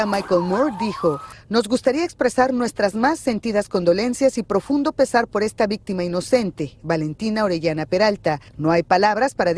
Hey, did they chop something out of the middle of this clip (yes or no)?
yes